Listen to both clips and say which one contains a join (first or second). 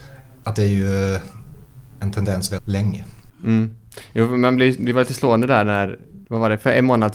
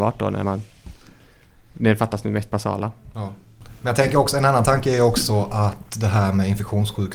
first